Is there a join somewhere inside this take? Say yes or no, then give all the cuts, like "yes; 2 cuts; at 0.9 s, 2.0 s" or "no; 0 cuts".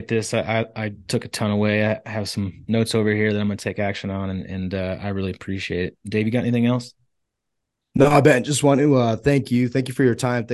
no; 0 cuts